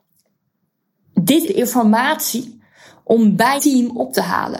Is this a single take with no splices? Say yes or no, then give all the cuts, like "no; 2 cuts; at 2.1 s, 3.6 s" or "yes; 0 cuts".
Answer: no; 2 cuts; at 1.5 s, 3.6 s